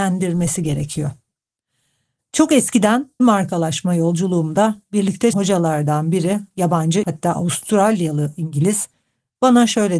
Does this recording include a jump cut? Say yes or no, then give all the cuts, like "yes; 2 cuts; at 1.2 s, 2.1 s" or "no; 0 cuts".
yes; 3 cuts; at 3.2 s, 5.3 s, 7.0 s